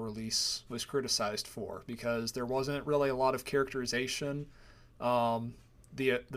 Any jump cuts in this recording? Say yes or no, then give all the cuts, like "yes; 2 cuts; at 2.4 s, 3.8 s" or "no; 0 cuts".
no; 0 cuts